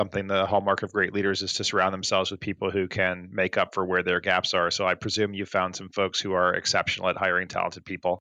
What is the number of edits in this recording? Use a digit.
0